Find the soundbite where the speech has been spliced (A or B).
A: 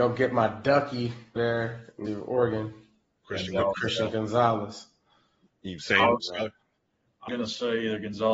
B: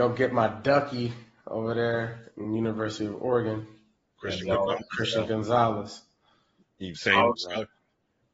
A